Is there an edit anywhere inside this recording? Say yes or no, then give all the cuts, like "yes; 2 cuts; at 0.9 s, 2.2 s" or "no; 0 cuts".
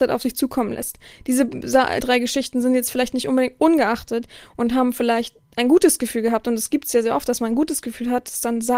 yes; 2 cuts; at 2.0 s, 5.4 s